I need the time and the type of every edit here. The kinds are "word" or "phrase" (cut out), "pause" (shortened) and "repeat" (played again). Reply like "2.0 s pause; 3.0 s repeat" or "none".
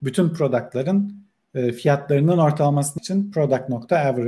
3.0 s word